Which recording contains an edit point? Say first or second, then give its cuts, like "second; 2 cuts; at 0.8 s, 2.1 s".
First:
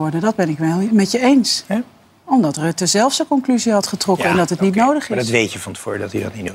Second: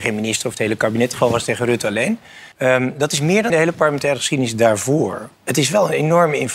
second; 4 cuts; at 1.1 s, 2.5 s, 3.5 s, 5.3 s